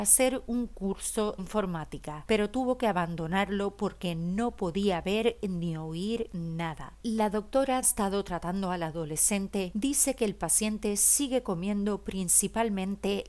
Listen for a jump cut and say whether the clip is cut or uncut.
cut